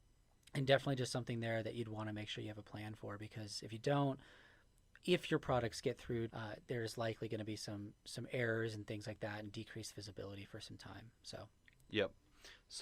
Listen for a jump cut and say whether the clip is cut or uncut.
cut